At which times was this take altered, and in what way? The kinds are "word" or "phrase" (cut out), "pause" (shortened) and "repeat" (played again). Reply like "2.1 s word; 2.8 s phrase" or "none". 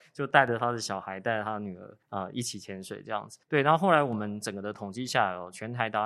2.0 s pause; 3.4 s pause